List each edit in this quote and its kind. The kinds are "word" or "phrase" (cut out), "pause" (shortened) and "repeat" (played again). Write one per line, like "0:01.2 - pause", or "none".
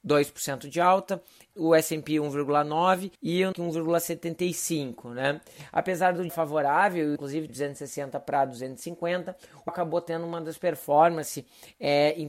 0:01.5 - word
0:03.2 - pause
0:03.5 - word
0:06.3 - word
0:07.2 - phrase
0:07.5 - phrase
0:09.7 - word
0:10.6 - word

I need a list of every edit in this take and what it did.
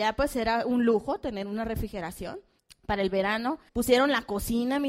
0:02.6 - pause
0:03.7 - pause

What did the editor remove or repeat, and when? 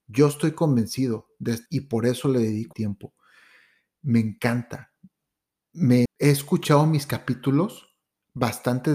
0:01.7 - word
0:02.7 - word
0:06.1 - word

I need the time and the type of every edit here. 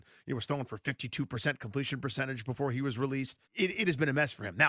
0:03.4 - pause

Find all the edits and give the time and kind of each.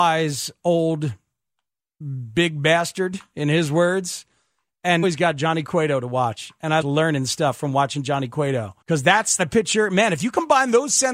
0:05.0 - word
0:06.8 - phrase
0:08.8 - pause
0:09.4 - word

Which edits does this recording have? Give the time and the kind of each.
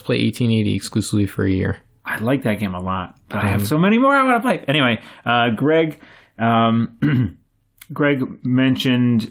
0:02.0 - pause

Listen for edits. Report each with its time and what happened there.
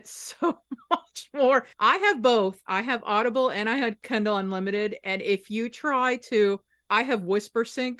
0:01.7 - pause

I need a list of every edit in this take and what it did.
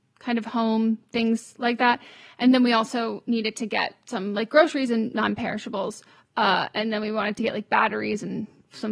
none

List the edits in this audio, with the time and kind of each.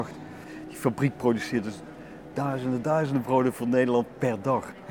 0:02.8 - word

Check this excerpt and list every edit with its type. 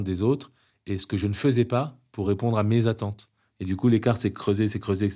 none

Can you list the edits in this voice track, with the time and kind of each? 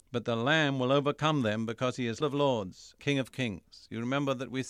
0:02.2 - word
0:03.0 - word

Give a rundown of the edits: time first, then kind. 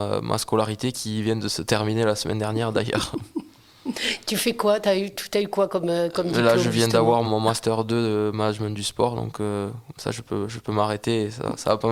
0:07.2 - word

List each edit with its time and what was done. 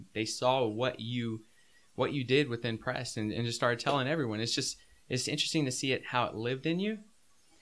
none

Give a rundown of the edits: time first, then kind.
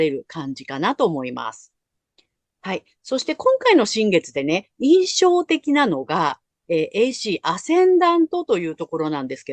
none

